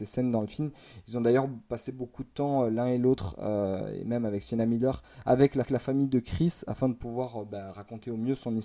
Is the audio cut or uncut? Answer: cut